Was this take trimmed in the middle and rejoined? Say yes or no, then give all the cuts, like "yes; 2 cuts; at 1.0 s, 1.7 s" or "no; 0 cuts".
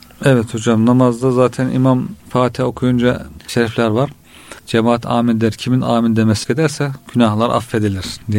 yes; 4 cuts; at 2.2 s, 3.5 s, 4.6 s, 6.4 s